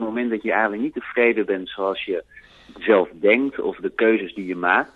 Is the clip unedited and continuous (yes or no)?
yes